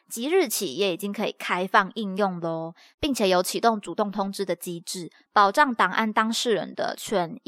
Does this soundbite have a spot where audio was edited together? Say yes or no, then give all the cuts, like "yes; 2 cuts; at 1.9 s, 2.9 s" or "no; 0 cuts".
no; 0 cuts